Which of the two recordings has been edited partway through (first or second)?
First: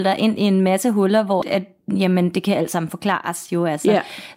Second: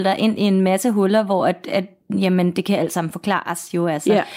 first